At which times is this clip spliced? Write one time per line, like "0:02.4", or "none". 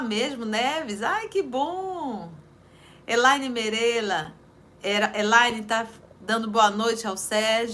none